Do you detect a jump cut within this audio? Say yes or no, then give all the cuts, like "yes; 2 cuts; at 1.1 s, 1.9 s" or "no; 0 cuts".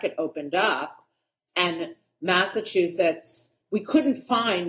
no; 0 cuts